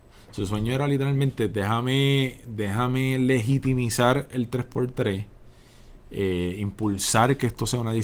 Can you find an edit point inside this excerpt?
no; 0 cuts

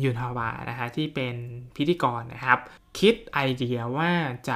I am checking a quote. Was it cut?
yes; 1 cut; at 2.8 s

